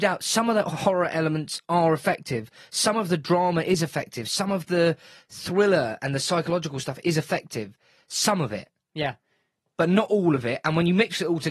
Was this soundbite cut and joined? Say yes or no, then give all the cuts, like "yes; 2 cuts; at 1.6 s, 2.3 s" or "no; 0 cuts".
no; 0 cuts